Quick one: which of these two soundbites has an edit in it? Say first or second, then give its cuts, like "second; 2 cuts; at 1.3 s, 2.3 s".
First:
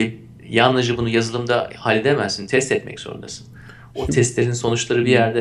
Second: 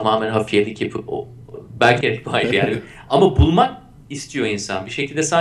second; 2 cuts; at 1.1 s, 2.0 s